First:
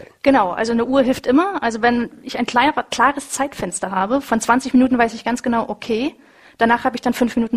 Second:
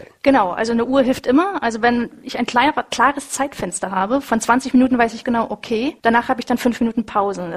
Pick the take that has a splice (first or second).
second